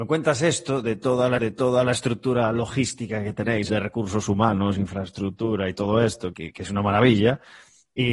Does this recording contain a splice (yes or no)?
yes